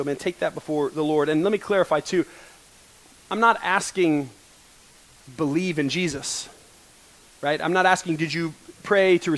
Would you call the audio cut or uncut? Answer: cut